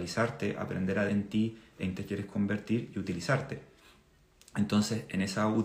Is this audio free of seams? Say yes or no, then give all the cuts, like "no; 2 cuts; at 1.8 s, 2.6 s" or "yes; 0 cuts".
no; 2 cuts; at 1.1 s, 2.0 s